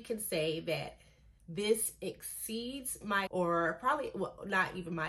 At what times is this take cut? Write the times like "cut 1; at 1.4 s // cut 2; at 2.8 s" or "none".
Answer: cut 1; at 3.3 s